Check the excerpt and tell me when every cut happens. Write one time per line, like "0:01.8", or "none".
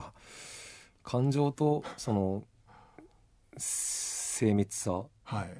none